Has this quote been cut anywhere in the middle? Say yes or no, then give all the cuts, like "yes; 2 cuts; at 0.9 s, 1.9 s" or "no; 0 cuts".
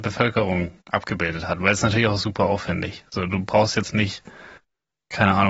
no; 0 cuts